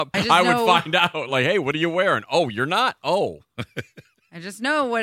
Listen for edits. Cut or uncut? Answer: uncut